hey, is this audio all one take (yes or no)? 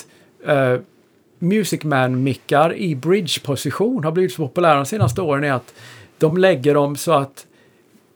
yes